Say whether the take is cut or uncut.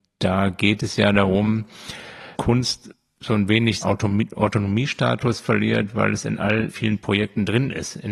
cut